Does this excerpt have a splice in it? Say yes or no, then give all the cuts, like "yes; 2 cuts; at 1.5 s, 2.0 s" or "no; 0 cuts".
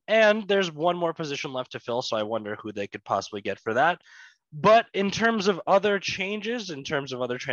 no; 0 cuts